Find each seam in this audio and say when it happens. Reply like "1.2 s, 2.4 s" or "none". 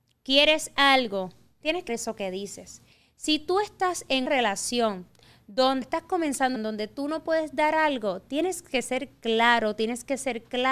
1.9 s, 4.3 s, 5.8 s, 6.6 s